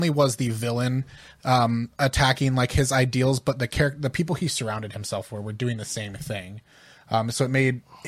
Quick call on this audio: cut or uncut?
uncut